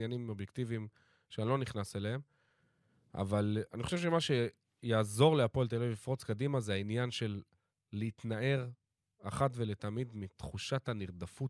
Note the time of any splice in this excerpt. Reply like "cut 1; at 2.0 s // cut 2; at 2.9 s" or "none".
none